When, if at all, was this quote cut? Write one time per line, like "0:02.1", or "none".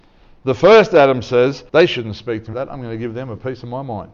0:01.7
0:02.5